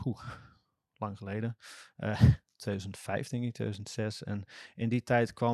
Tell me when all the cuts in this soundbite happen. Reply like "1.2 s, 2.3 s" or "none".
none